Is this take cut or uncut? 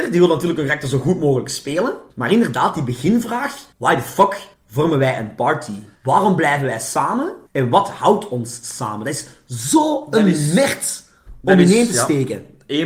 cut